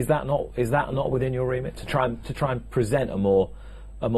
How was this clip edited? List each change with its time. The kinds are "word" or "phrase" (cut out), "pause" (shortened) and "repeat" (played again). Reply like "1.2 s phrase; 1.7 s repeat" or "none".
none